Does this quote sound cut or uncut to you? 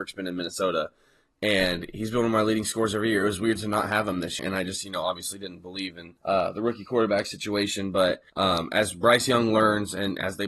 cut